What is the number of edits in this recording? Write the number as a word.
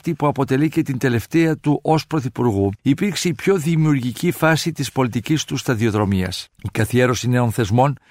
two